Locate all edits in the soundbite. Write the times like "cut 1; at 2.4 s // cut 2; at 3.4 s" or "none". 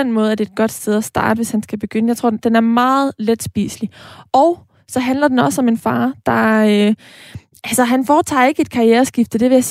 none